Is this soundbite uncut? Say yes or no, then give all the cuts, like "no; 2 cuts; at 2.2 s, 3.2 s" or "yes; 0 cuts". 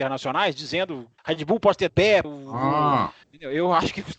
no; 4 cuts; at 1.2 s, 1.9 s, 2.2 s, 3.2 s